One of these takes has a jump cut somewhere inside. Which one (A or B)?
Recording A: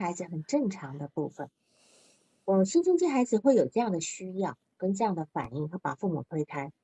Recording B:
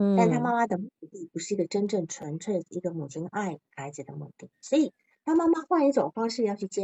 B